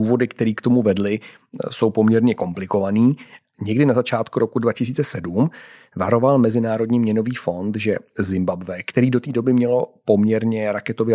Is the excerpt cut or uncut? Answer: uncut